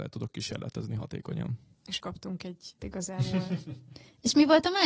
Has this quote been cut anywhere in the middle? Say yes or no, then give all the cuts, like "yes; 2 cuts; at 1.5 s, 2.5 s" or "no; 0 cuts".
yes; 2 cuts; at 2.0 s, 2.8 s